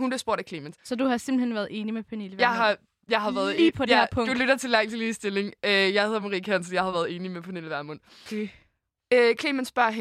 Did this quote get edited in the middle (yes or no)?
no